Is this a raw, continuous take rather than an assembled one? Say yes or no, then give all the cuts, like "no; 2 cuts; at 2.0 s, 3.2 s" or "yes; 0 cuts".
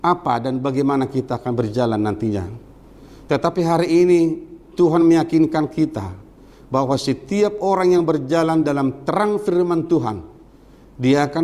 yes; 0 cuts